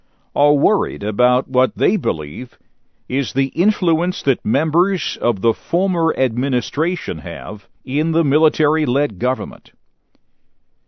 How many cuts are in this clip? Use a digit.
1